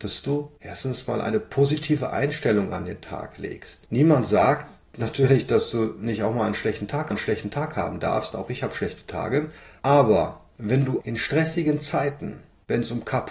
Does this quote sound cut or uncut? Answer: cut